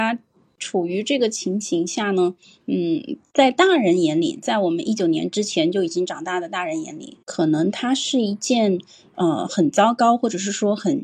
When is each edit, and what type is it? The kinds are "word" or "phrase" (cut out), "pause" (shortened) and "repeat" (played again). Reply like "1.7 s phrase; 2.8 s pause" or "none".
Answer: 7.2 s pause